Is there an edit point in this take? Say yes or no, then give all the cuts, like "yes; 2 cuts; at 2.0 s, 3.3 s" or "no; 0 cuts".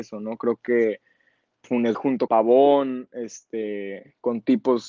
yes; 3 cuts; at 1.6 s, 1.9 s, 2.3 s